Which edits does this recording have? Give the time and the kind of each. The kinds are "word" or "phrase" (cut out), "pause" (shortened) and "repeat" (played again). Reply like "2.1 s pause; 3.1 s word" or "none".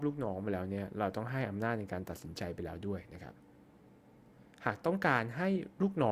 4.5 s pause